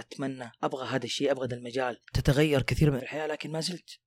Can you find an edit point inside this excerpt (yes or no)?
yes